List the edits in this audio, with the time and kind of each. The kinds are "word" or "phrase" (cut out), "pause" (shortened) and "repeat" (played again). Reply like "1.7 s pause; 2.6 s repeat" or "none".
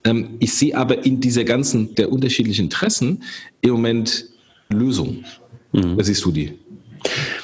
1.9 s word; 4.7 s word